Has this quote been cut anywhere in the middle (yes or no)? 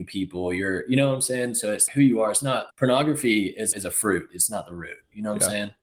yes